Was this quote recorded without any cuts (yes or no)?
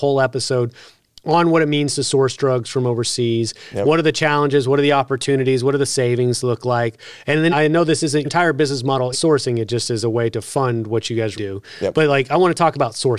no